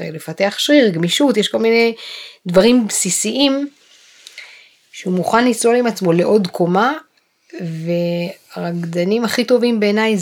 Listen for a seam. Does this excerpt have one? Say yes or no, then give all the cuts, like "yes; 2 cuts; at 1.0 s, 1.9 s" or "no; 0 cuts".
no; 0 cuts